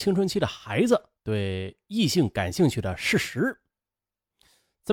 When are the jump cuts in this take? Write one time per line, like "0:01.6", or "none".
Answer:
0:01.2